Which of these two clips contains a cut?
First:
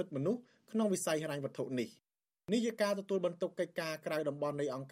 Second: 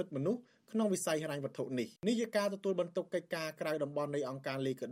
second; 1 cut; at 2.0 s

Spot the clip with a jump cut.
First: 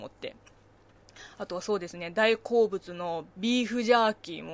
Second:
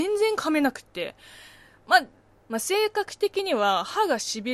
first; 1 cut; at 3.3 s

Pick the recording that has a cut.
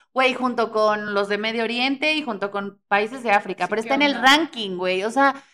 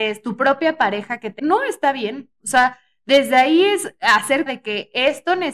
second; 2 cuts; at 1.4 s, 4.5 s

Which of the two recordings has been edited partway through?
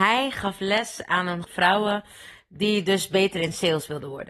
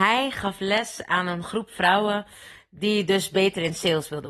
first; 1 cut; at 1.4 s

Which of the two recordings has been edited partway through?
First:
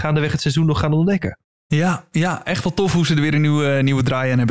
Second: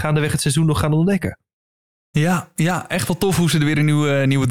first; 1 cut; at 1.4 s

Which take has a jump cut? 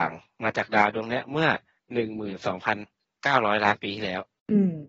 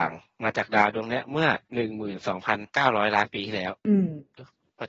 second; 3 cuts; at 1.6 s, 2.7 s, 3.8 s

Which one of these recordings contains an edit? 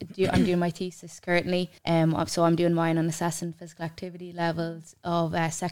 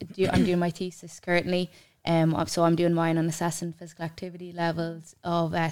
first; 1 cut; at 1.8 s

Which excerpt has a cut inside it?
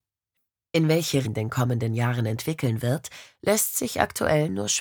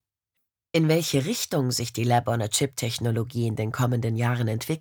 first; 1 cut; at 1.3 s

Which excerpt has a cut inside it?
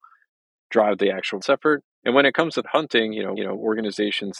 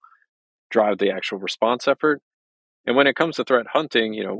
first; 4 cuts; at 1.4 s, 1.9 s, 2.6 s, 3.4 s

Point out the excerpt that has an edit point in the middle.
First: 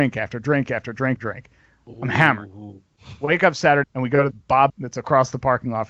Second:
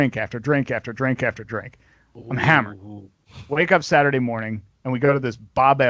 first; 4 cuts; at 1.2 s, 3.8 s, 4.3 s, 4.7 s

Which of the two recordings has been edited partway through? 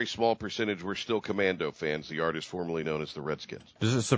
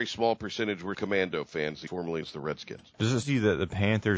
second; 4 cuts; at 0.9 s, 1.9 s, 2.2 s, 3.2 s

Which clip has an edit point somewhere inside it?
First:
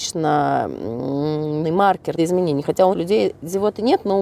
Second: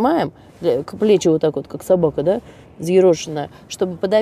first; 3 cuts; at 1.6 s, 2.2 s, 2.9 s

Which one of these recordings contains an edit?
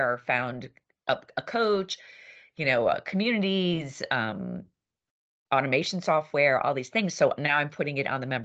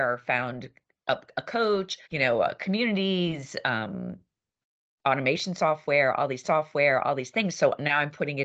second; 2 cuts; at 2.0 s, 6.4 s

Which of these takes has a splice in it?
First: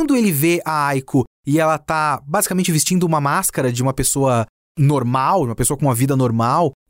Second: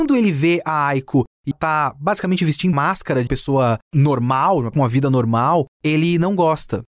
second; 5 cuts; at 1.5 s, 2.7 s, 3.3 s, 3.8 s, 4.7 s

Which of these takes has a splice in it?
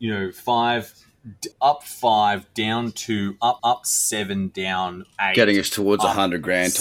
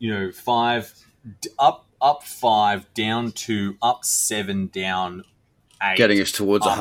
first; 3 cuts; at 1.5 s, 3.6 s, 5.1 s

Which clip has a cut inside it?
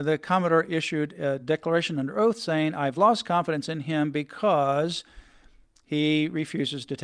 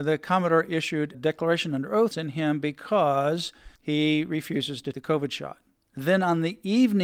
second; 4 cuts; at 1.1 s, 2.1 s, 3.7 s, 4.9 s

